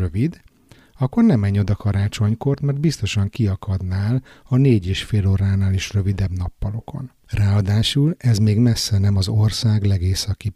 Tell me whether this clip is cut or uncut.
uncut